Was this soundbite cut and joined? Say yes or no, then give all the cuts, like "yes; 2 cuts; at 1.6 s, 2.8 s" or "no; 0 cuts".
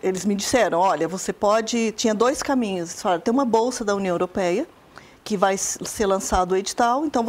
no; 0 cuts